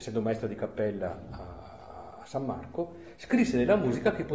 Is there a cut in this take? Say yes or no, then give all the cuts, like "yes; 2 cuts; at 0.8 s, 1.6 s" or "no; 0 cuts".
no; 0 cuts